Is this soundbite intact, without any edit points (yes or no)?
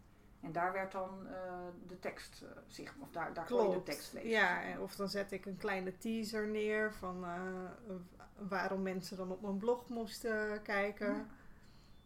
yes